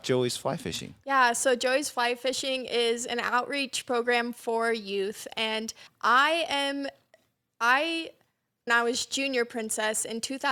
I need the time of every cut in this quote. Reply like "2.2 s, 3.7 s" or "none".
5.9 s, 8.7 s